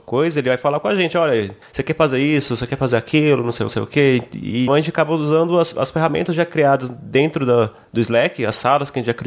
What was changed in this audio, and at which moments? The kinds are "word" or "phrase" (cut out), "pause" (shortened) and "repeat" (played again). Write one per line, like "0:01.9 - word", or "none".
0:03.7 - repeat
0:04.7 - word